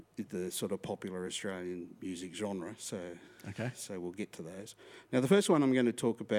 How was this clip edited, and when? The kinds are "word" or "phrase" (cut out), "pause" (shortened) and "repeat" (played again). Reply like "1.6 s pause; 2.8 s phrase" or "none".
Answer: none